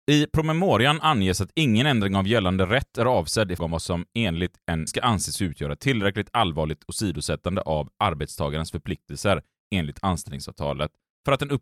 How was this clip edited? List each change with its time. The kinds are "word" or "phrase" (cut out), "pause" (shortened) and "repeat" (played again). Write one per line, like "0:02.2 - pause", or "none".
0:03.6 - word
0:04.9 - word